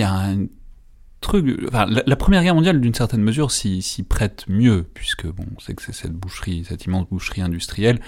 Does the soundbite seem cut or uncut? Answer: uncut